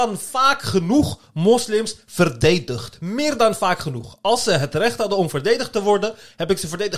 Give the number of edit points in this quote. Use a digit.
0